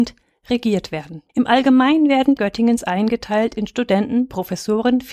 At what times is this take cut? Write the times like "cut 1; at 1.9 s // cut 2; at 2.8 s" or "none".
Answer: cut 1; at 1.3 s // cut 2; at 2.4 s